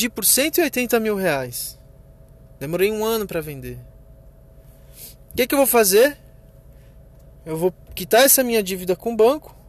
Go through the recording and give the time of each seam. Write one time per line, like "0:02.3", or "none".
none

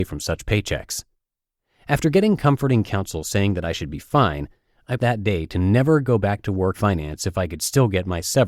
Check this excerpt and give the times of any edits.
0:05.0
0:06.7

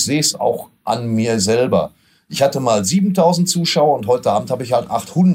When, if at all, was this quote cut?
none

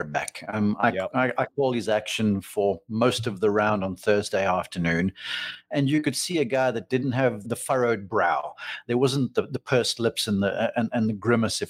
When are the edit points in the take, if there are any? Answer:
0:07.4

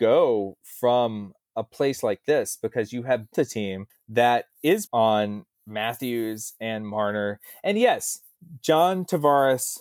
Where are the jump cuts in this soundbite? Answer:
0:03.3
0:03.9
0:04.9
0:05.5

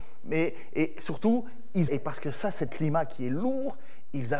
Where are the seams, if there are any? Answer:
0:01.9
0:02.7

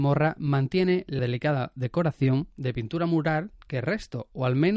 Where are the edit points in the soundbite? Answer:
0:01.2

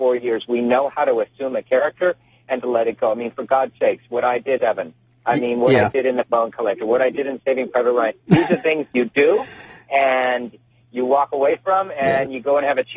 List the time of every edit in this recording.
0:04.6

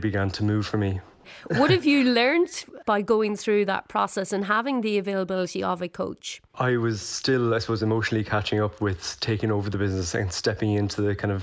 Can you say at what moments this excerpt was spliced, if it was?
0:02.8
0:06.5

